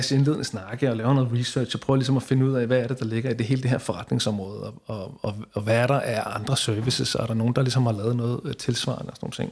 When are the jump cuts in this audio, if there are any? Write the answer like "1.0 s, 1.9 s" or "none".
none